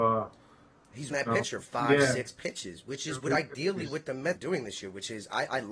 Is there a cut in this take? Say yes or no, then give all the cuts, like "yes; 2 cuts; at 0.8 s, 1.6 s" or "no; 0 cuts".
yes; 2 cuts; at 1.1 s, 4.4 s